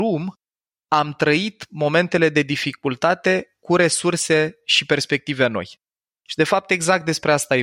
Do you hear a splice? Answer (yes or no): no